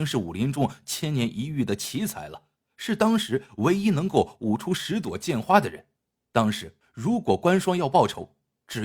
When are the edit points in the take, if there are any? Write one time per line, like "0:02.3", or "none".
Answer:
0:02.6
0:06.0
0:06.8